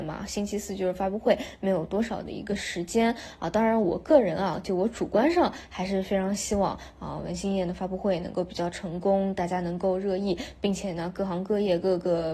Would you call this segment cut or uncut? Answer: uncut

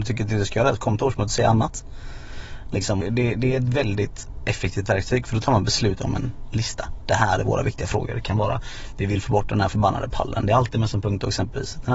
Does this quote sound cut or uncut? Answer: cut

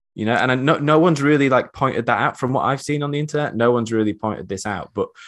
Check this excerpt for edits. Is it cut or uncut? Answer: uncut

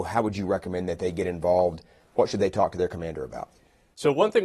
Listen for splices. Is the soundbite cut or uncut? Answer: uncut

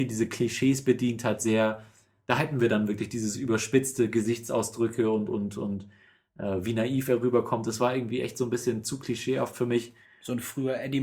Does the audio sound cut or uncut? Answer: uncut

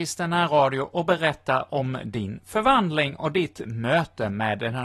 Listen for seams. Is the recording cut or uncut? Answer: uncut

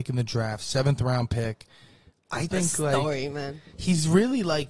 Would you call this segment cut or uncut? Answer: cut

